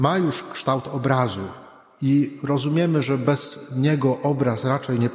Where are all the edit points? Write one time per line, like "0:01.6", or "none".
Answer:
none